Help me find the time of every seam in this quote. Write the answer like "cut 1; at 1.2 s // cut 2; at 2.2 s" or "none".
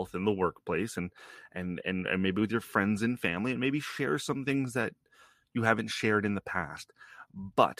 none